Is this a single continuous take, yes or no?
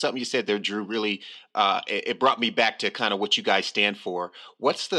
yes